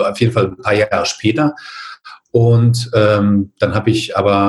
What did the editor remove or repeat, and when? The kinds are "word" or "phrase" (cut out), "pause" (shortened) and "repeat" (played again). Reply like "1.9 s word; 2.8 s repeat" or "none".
none